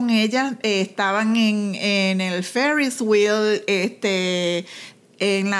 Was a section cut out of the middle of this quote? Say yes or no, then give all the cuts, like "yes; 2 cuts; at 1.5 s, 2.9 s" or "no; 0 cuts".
no; 0 cuts